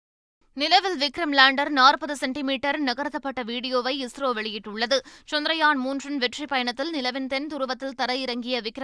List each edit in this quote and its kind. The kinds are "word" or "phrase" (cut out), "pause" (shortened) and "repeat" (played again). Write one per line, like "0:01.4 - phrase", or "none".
none

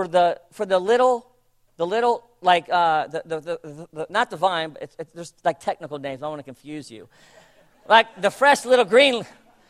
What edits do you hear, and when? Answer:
none

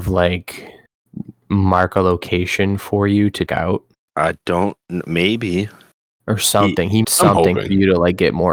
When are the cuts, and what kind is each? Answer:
0:03.5 - word
0:07.0 - word

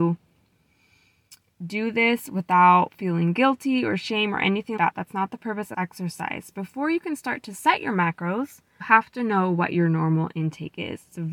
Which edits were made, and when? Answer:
0:04.8 - word
0:05.7 - word
0:08.8 - word

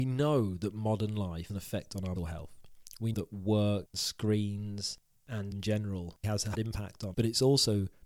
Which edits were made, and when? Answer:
0:01.5 - word
0:02.2 - word
0:03.1 - word
0:03.9 - word
0:05.5 - word
0:06.2 - word
0:06.5 - word
0:07.1 - word

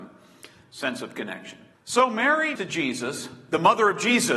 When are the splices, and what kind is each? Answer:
0:01.7 - pause
0:02.6 - word

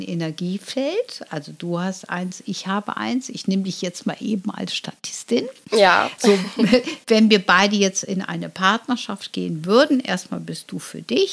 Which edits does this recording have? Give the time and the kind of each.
none

